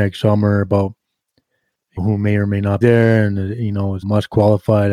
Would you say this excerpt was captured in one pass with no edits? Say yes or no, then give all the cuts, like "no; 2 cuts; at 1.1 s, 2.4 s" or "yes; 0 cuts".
no; 3 cuts; at 2.0 s, 2.8 s, 4.0 s